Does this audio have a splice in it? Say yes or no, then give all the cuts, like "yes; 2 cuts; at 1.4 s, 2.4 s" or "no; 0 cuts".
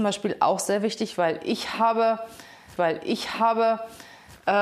yes; 1 cut; at 2.8 s